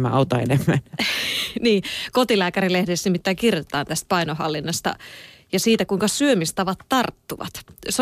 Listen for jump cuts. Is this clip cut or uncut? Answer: uncut